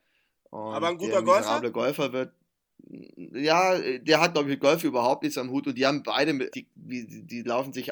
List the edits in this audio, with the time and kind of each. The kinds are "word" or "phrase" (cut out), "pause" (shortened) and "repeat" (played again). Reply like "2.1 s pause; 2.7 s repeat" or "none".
6.5 s word